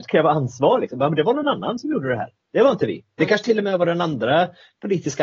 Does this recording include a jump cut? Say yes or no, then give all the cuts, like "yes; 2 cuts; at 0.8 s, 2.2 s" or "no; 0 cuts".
no; 0 cuts